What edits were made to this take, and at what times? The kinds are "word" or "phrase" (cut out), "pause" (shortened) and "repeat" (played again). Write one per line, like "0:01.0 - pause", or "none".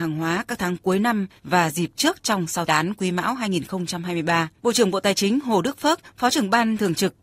0:01.4 - pause
0:02.7 - phrase
0:04.6 - pause